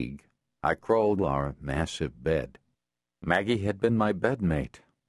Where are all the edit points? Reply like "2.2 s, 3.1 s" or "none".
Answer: 1.2 s, 2.9 s